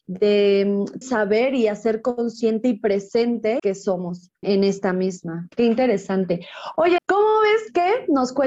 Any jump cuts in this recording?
yes; 4 cuts; at 1.0 s, 3.6 s, 4.4 s, 7.0 s

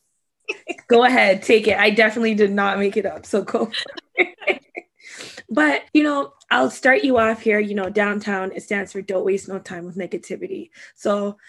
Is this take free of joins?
no; 1 cut; at 5.9 s

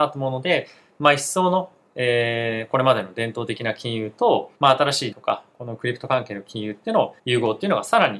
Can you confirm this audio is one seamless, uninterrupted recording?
no; 3 cuts; at 4.6 s, 5.1 s, 7.2 s

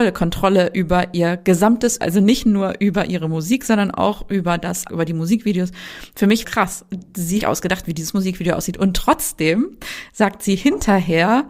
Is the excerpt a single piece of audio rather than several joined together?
no; 4 cuts; at 2.0 s, 4.9 s, 6.4 s, 7.4 s

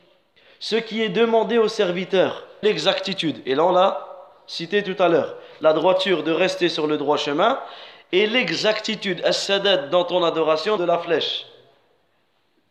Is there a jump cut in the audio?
yes; 2 cuts; at 2.6 s, 10.8 s

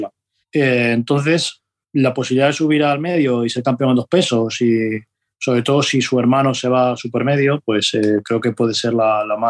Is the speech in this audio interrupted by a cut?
no; 0 cuts

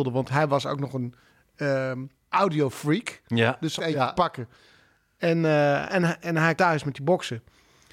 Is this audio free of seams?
no; 4 cuts; at 2.2 s, 3.8 s, 6.2 s, 6.6 s

